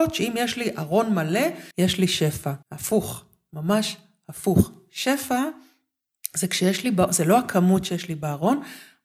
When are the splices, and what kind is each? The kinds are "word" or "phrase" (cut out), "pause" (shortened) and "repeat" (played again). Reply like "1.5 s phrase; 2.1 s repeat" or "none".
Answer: 1.7 s pause; 2.6 s pause